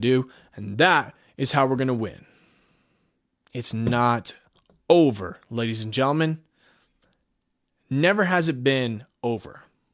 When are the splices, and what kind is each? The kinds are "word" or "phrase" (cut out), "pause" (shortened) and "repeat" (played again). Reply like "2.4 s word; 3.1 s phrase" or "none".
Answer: none